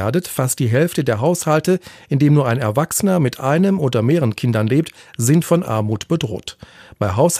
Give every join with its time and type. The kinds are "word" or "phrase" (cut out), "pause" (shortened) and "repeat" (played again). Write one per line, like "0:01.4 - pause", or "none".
none